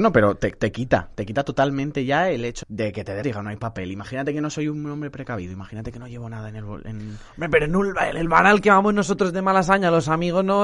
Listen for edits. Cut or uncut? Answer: cut